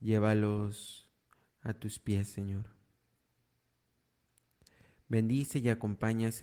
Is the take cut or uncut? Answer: uncut